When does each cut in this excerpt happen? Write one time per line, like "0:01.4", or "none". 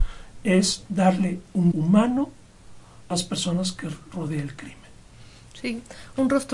0:01.7
0:03.1